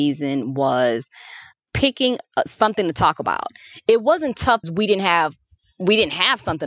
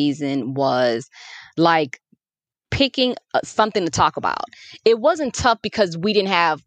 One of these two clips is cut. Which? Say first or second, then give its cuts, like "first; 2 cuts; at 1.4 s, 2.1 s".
first; 2 cuts; at 1.5 s, 4.6 s